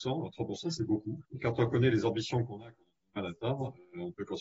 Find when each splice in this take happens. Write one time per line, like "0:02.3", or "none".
0:01.3